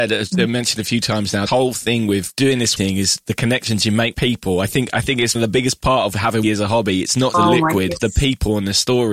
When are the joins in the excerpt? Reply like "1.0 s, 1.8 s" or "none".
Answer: 1.5 s, 2.8 s, 4.1 s, 5.3 s, 6.4 s, 7.3 s, 8.0 s